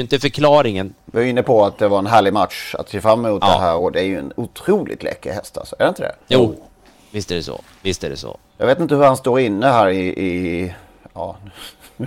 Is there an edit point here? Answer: yes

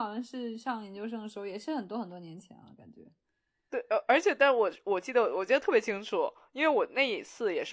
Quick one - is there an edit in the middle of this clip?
no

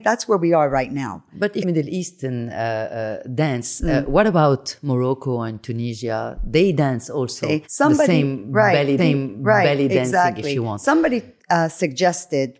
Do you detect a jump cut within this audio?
yes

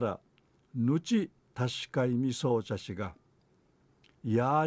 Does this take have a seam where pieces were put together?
no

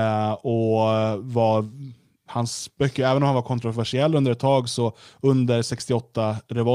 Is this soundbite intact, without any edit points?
yes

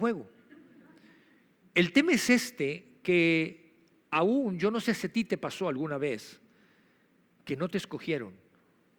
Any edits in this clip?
no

